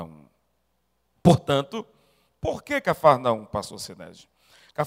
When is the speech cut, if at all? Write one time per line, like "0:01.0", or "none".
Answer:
none